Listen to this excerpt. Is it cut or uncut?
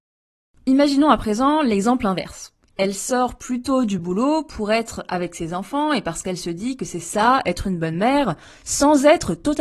uncut